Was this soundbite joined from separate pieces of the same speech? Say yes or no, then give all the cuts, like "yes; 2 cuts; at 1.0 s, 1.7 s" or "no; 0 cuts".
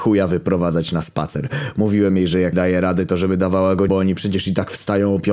yes; 2 cuts; at 2.5 s, 3.9 s